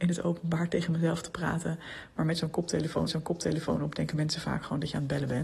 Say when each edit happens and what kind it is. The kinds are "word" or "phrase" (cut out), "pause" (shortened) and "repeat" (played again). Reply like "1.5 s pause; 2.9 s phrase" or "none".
3.1 s repeat